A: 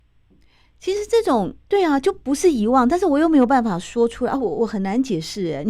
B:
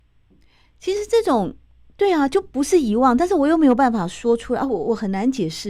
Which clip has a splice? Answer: A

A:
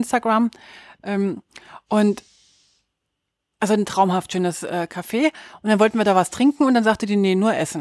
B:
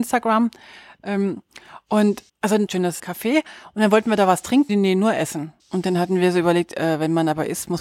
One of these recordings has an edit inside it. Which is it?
B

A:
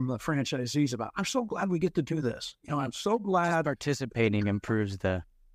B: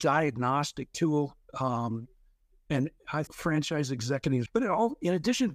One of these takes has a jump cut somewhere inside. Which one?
B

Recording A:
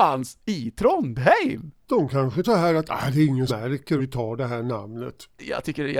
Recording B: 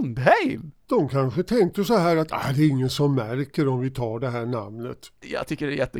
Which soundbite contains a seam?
A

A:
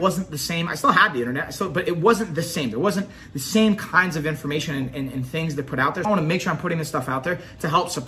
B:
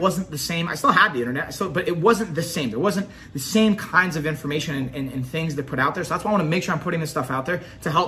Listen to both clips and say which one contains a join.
A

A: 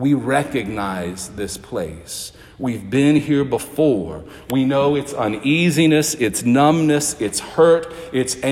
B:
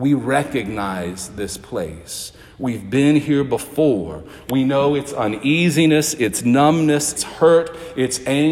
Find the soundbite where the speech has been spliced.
B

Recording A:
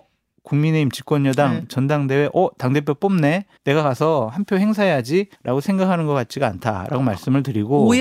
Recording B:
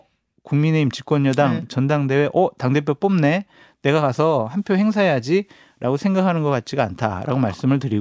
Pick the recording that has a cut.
A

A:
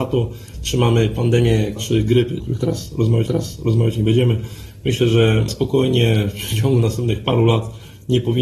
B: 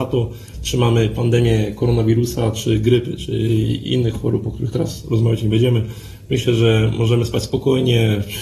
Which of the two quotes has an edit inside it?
A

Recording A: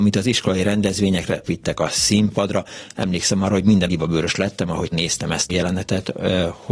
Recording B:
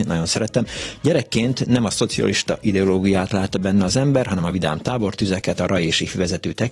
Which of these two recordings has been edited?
A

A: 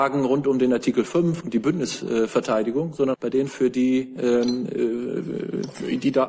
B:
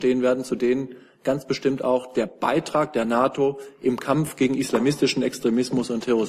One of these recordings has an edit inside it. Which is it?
A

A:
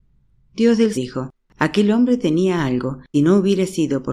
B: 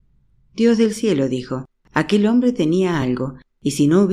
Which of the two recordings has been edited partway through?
A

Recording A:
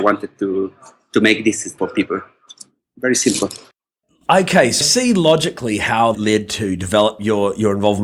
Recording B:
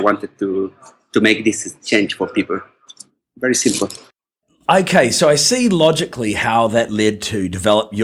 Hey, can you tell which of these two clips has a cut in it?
A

